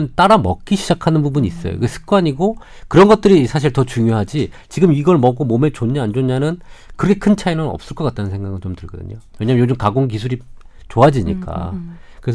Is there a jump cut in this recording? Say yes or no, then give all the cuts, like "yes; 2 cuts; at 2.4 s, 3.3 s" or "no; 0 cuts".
no; 0 cuts